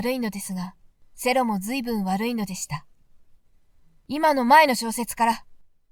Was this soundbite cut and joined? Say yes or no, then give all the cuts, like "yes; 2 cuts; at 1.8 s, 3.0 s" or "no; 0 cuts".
no; 0 cuts